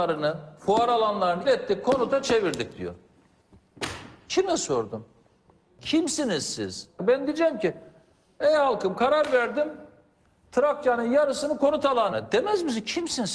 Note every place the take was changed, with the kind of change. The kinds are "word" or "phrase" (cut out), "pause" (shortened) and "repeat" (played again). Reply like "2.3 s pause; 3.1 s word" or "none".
1.4 s word; 12.1 s word